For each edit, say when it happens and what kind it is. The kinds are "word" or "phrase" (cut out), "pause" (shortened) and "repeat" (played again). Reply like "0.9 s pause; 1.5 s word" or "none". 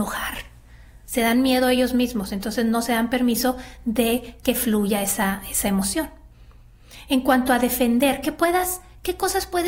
none